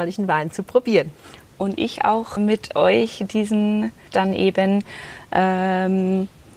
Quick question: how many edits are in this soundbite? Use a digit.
2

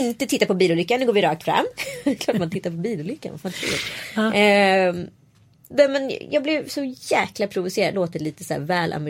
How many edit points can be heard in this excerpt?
1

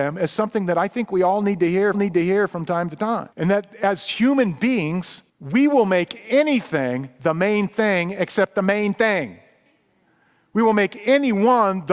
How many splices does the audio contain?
3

